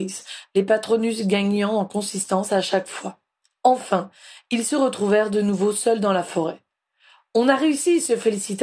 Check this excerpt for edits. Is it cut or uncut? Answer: uncut